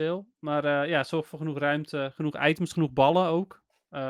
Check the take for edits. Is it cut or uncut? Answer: uncut